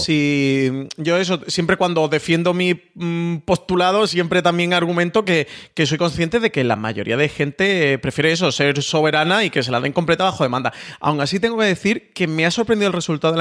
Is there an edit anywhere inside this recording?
no; 0 cuts

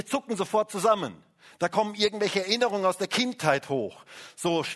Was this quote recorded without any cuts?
yes; 0 cuts

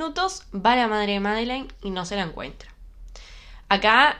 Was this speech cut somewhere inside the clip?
no; 0 cuts

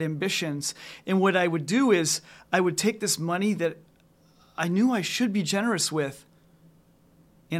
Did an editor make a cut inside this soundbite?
no; 0 cuts

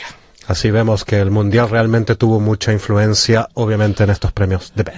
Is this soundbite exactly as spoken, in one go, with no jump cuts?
yes; 0 cuts

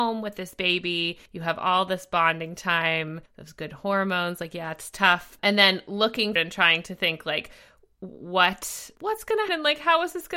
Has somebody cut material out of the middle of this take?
yes; 6 cuts; at 1.3 s, 3.3 s, 5.4 s, 6.4 s, 9.0 s, 9.5 s

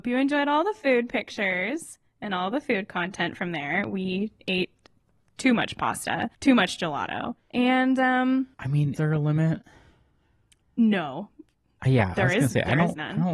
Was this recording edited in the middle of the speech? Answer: yes; 4 cuts; at 6.3 s, 7.4 s, 8.5 s, 9.0 s

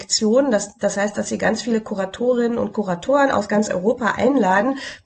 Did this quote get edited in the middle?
no; 0 cuts

